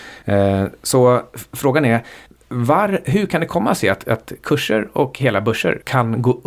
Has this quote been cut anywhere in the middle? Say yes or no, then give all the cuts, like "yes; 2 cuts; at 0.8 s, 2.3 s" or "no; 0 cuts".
no; 0 cuts